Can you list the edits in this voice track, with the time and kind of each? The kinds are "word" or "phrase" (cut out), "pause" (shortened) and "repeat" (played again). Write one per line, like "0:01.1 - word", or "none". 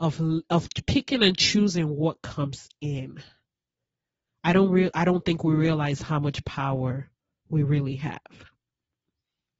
none